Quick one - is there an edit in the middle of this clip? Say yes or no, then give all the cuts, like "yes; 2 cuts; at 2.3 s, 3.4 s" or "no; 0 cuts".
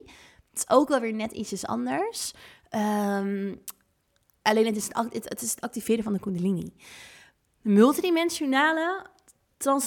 no; 0 cuts